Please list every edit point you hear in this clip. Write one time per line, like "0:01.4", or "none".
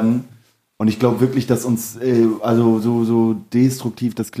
none